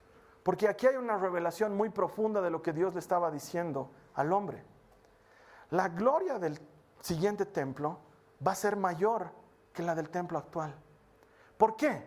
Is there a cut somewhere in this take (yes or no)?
no